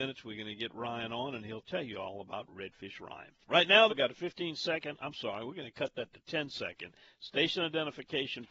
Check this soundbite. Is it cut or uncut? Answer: cut